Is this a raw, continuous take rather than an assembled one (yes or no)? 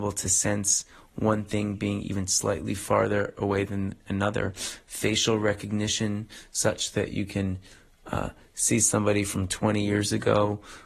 yes